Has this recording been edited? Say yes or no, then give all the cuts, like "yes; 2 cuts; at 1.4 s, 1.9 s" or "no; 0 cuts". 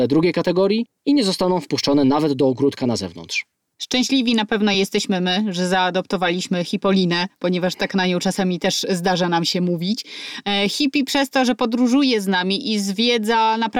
no; 0 cuts